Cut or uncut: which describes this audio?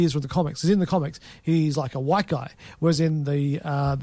uncut